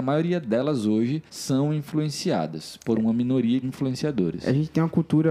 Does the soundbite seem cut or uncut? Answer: cut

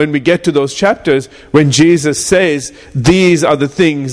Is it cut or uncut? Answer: uncut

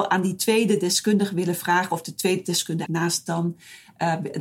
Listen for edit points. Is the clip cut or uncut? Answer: cut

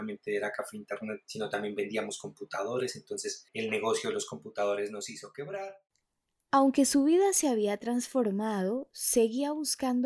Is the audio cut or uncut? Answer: uncut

